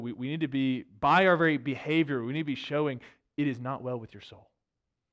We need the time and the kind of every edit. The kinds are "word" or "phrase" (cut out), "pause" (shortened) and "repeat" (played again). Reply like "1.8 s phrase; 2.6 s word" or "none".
none

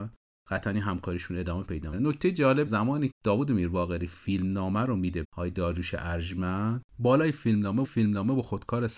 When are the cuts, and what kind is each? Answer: 1.9 s word; 2.7 s word; 3.1 s word; 5.2 s word; 6.9 s pause; 7.8 s repeat

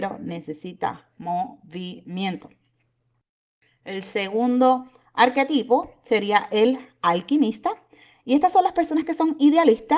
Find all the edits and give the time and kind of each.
none

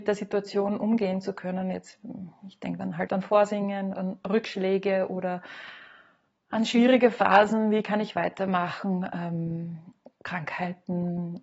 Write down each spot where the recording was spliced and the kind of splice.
3.1 s word; 3.9 s word

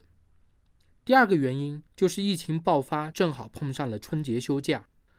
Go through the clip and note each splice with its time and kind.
1.9 s pause

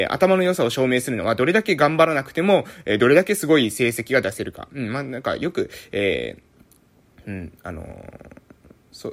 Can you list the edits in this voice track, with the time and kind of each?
none

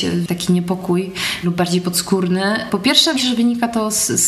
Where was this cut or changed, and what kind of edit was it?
1.4 s word; 3.1 s word

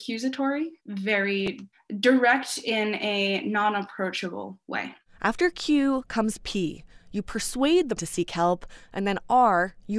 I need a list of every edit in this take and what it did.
8.0 s word

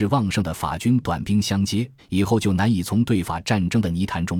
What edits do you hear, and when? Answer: 2.0 s pause

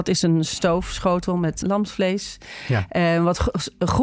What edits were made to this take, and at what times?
1.6 s word

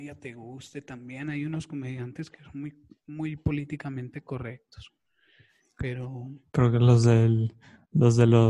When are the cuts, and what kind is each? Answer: none

